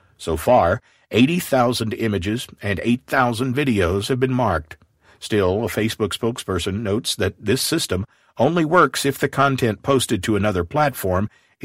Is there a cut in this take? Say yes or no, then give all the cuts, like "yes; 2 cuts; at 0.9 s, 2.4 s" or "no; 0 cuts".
no; 0 cuts